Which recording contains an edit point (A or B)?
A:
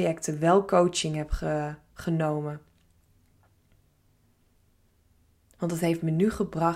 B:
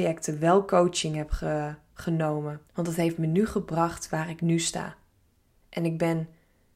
B